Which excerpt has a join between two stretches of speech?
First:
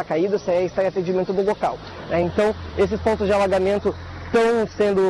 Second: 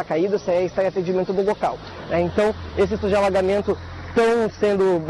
second; 1 cut; at 3.0 s

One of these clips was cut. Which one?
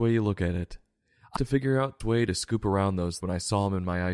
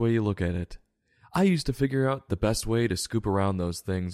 first; 3 cuts; at 1.4 s, 2.0 s, 3.2 s

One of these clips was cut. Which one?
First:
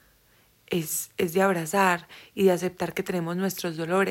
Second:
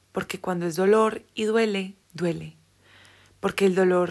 second; 1 cut; at 2.0 s

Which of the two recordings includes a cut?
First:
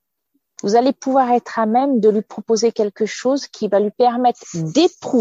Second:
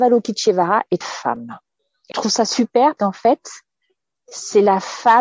second; 3 cuts; at 1.0 s, 2.1 s, 3.0 s

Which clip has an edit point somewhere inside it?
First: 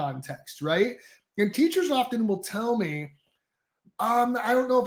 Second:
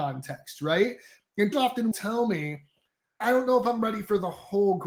second; 3 cuts; at 1.5 s, 1.9 s, 3.2 s

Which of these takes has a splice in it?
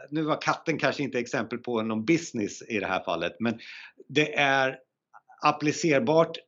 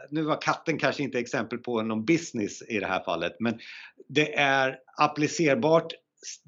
second; 1 cut; at 4.9 s

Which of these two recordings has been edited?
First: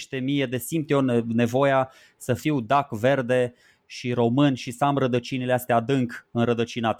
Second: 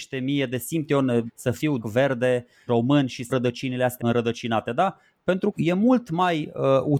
second; 6 cuts; at 1.3 s, 1.8 s, 2.7 s, 3.3 s, 4.0 s, 5.5 s

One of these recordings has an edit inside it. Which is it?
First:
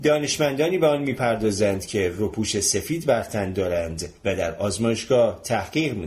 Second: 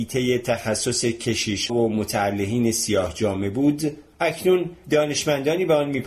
second; 1 cut; at 1.7 s

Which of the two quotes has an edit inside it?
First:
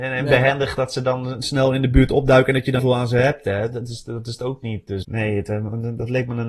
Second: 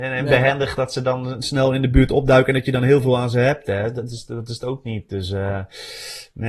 first; 2 cuts; at 2.8 s, 5.0 s

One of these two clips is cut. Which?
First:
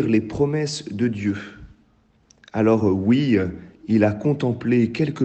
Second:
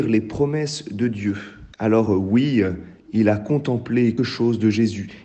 second; 2 cuts; at 1.7 s, 4.2 s

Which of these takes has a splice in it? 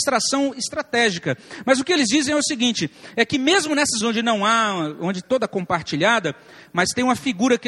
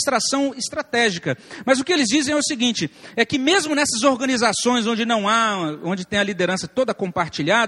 first; 2 cuts; at 4.0 s, 5.2 s

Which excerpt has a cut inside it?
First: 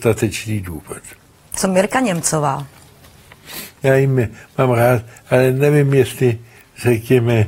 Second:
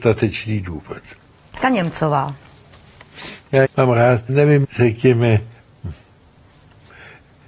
second; 4 cuts; at 1.6 s, 3.6 s, 4.3 s, 4.6 s

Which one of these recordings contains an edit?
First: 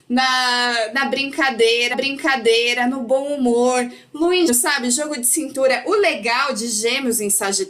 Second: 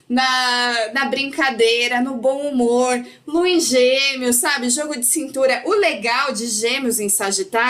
first; 2 cuts; at 1.9 s, 4.5 s

